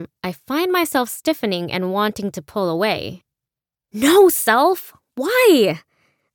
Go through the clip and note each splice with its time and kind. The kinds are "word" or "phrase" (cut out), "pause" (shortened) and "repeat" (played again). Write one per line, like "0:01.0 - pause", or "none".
none